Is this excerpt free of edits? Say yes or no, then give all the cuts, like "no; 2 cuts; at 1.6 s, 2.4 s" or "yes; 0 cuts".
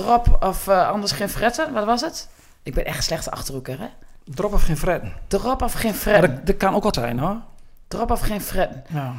no; 1 cut; at 6.9 s